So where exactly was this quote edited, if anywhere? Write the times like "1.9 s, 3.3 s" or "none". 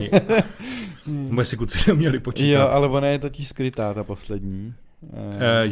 none